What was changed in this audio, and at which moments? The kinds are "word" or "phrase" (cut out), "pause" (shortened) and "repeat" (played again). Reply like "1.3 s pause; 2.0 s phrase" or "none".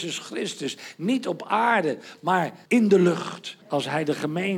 2.7 s pause; 3.6 s pause